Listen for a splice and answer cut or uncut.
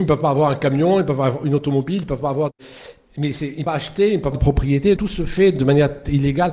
cut